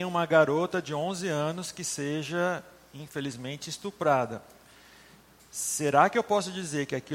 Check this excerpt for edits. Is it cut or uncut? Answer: uncut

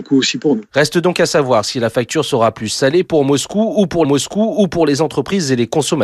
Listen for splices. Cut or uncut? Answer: cut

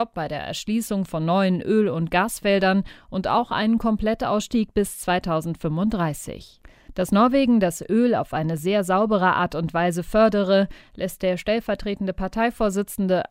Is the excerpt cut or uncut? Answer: uncut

